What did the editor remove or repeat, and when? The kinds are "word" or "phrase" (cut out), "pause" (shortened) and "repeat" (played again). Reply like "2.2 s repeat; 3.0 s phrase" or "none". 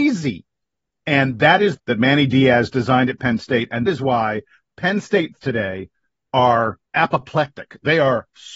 1.8 s phrase; 3.9 s word; 5.4 s word; 6.9 s pause